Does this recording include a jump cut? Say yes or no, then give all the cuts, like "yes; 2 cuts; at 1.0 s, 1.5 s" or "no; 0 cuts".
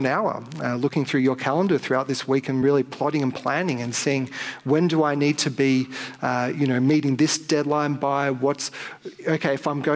no; 0 cuts